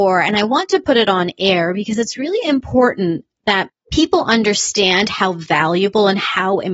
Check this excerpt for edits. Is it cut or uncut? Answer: uncut